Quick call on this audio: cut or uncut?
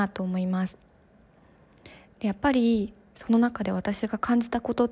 uncut